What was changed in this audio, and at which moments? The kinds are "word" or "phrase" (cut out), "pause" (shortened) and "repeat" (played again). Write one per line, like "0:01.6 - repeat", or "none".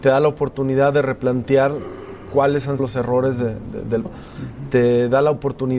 0:02.8 - word
0:04.1 - word